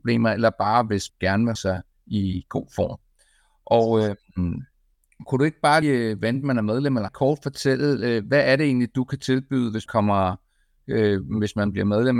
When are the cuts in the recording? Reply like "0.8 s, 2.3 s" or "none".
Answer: 1.1 s, 1.6 s, 5.8 s, 7.1 s, 9.9 s